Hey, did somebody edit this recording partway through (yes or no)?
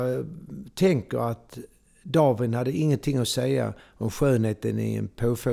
no